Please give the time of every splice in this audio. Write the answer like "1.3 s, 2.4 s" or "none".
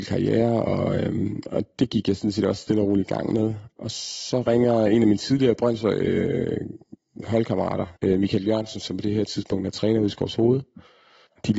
8.0 s